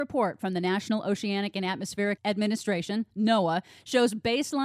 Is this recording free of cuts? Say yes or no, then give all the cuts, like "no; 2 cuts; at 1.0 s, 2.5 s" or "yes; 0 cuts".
yes; 0 cuts